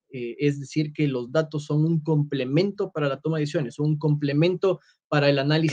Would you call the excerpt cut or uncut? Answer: uncut